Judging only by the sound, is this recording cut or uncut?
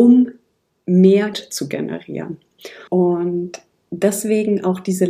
cut